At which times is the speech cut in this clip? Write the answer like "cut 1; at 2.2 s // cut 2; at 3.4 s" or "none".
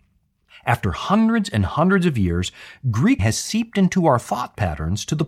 cut 1; at 3.2 s